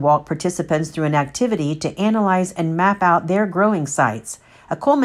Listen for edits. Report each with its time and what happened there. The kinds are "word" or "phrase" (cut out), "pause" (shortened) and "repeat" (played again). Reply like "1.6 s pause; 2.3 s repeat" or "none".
none